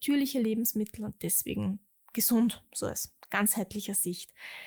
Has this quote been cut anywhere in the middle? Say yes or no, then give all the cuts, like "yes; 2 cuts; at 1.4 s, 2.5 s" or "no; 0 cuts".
no; 0 cuts